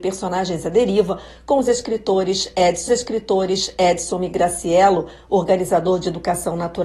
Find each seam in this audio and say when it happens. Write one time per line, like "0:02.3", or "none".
0:02.9